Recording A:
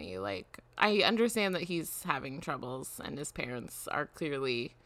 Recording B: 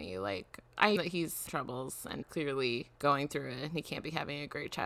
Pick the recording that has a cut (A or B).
B